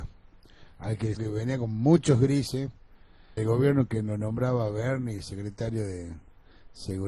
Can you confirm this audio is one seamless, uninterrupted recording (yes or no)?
no